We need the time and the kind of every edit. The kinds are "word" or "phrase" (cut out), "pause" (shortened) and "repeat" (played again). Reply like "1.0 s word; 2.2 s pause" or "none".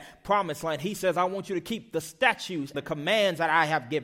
2.7 s word